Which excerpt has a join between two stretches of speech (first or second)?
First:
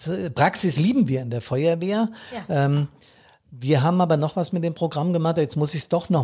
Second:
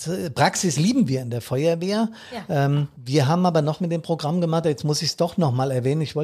second